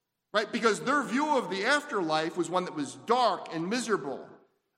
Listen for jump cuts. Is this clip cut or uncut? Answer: uncut